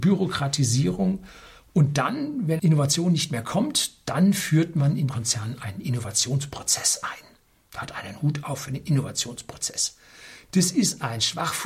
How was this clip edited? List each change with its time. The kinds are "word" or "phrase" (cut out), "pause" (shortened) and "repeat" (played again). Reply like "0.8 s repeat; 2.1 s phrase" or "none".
2.6 s word; 5.1 s word